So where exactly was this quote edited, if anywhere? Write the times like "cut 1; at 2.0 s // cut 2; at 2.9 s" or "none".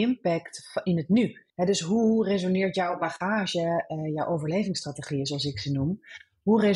cut 1; at 1.5 s

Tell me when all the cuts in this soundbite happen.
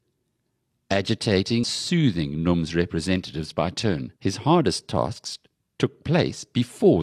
cut 1; at 1.6 s // cut 2; at 4.2 s

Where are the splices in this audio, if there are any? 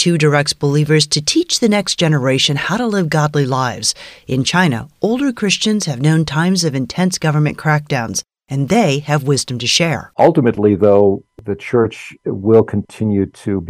none

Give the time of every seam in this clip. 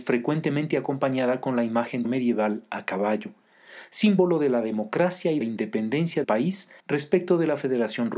cut 1; at 2.0 s // cut 2; at 5.4 s // cut 3; at 6.2 s // cut 4; at 6.8 s

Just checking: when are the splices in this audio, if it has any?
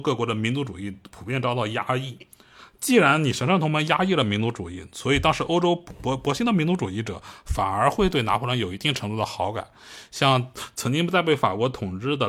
none

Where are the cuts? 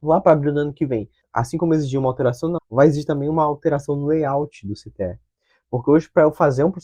cut 1; at 2.6 s

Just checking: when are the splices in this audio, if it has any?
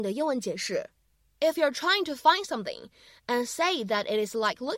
none

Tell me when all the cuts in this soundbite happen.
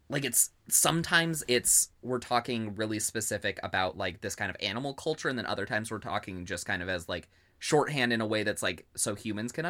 cut 1; at 1.9 s

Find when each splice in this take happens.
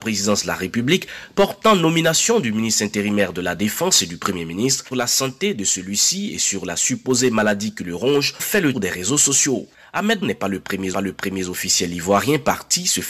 cut 1; at 4.9 s // cut 2; at 8.4 s // cut 3; at 8.7 s // cut 4; at 10.2 s // cut 5; at 10.9 s

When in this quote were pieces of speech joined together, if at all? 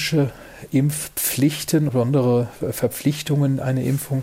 cut 1; at 1.9 s

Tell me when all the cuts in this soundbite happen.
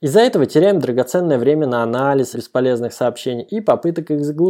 cut 1; at 2.3 s

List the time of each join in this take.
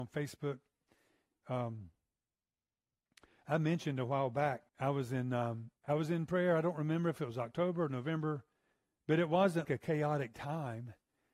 cut 1; at 4.7 s // cut 2; at 5.8 s // cut 3; at 9.6 s

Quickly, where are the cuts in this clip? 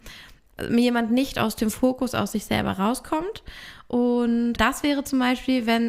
cut 1; at 4.6 s

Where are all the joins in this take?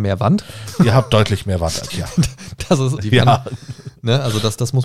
cut 1; at 1.9 s // cut 2; at 3.0 s

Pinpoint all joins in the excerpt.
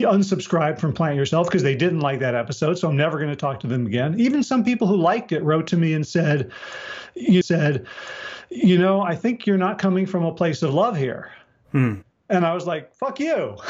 cut 1; at 7.4 s

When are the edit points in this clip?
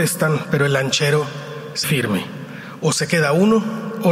cut 1; at 1.8 s

